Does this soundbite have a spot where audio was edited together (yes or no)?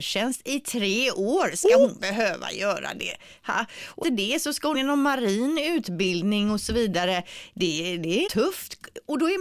yes